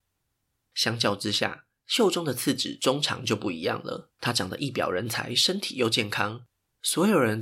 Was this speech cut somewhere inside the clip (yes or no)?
yes